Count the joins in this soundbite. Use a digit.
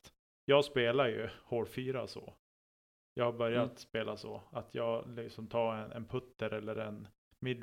0